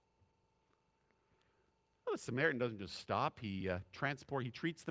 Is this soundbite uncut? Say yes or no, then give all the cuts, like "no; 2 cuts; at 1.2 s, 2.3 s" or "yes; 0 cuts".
yes; 0 cuts